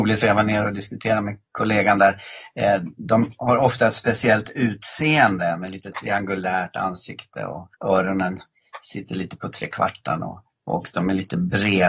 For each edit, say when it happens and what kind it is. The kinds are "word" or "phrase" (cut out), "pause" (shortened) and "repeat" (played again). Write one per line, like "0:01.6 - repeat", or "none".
0:01.5 - pause
0:07.7 - pause
0:10.5 - pause